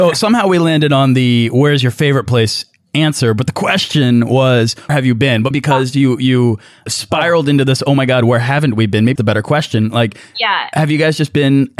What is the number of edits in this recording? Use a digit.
4